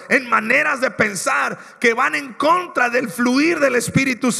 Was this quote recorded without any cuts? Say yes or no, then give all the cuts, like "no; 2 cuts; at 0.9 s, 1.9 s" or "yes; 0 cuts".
yes; 0 cuts